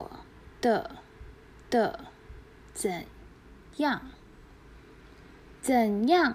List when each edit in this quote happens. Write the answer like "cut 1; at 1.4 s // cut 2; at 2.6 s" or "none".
cut 1; at 1.6 s

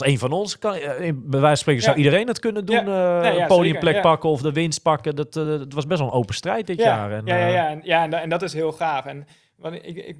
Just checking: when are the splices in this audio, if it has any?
none

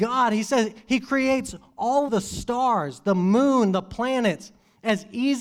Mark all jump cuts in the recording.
cut 1; at 2.1 s

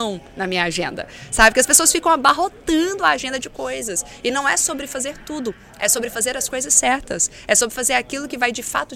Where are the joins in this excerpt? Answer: none

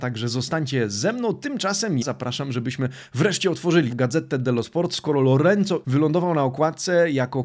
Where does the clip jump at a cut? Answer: cut 1; at 2.0 s // cut 2; at 3.9 s // cut 3; at 5.8 s

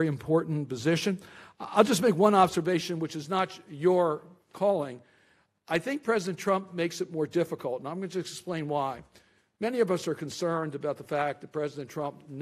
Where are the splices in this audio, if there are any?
none

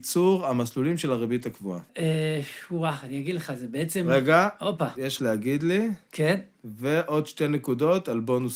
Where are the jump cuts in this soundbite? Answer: cut 1; at 1.9 s // cut 2; at 5.2 s

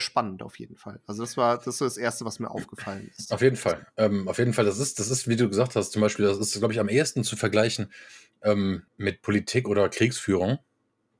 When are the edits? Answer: cut 1; at 8.9 s

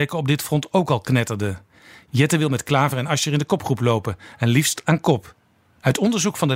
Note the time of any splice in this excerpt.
none

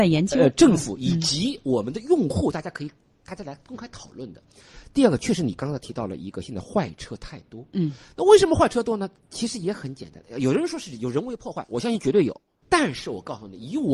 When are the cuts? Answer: none

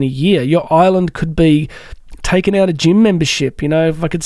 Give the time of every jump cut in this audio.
none

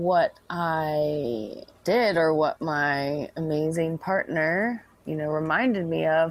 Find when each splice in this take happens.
cut 1; at 1.7 s

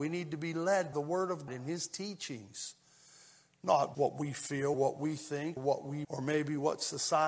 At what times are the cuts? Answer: cut 1; at 0.9 s // cut 2; at 1.5 s // cut 3; at 3.9 s // cut 4; at 4.7 s // cut 5; at 5.6 s // cut 6; at 6.0 s

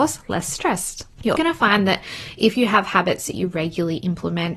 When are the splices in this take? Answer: cut 1; at 1.3 s

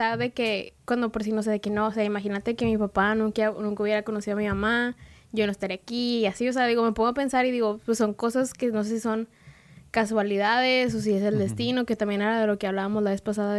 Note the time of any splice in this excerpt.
none

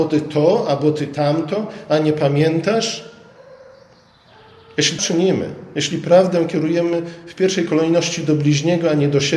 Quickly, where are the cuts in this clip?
cut 1; at 5.0 s

